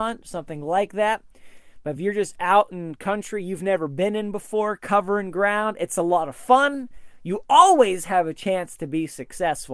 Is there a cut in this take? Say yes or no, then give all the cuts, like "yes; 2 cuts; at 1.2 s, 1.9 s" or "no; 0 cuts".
no; 0 cuts